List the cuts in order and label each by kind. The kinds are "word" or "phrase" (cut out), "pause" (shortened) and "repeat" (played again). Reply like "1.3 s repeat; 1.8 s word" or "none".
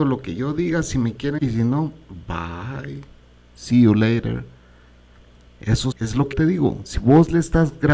1.4 s word; 5.9 s word; 6.3 s word